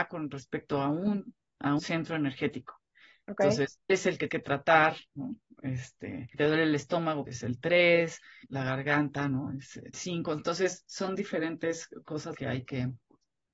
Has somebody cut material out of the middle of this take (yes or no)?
yes